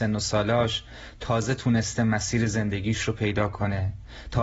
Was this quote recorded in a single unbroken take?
yes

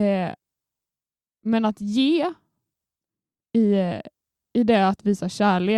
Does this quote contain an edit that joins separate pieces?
no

